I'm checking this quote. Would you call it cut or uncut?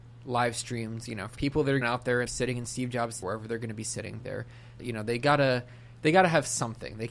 cut